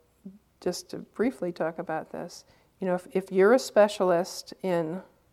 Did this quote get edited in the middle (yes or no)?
no